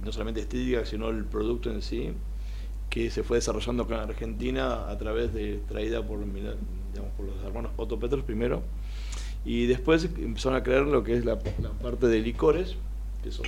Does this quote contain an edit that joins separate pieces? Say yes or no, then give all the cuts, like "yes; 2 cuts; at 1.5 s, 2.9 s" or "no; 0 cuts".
yes; 1 cut; at 7.8 s